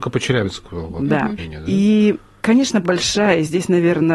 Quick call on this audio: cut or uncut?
cut